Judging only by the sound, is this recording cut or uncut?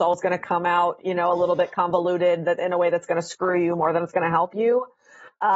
uncut